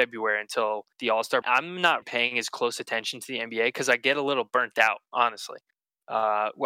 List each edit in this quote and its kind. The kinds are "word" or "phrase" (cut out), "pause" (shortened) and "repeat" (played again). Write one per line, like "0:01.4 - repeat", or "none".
0:00.9 - pause
0:01.4 - phrase
0:02.0 - word